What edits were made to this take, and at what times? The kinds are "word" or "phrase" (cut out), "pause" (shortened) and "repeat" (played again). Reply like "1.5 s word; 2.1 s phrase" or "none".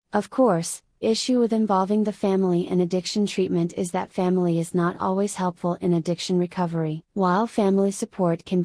1.0 s word; 7.1 s pause